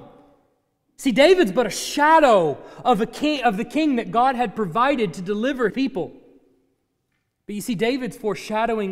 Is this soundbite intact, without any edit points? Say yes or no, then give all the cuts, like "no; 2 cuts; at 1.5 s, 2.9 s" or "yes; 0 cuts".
no; 1 cut; at 5.7 s